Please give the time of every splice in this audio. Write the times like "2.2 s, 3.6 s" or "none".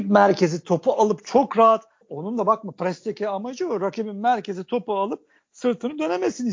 none